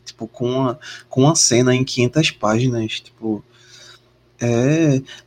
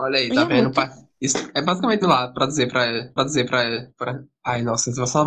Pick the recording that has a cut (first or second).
second